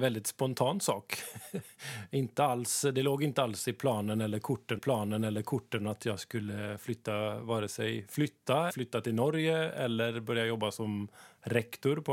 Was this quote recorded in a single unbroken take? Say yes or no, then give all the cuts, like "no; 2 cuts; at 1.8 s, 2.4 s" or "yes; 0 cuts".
no; 2 cuts; at 4.8 s, 8.7 s